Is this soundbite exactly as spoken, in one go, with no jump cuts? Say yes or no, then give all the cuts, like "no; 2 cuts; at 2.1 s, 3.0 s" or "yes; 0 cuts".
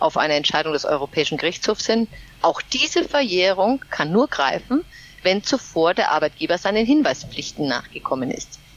yes; 0 cuts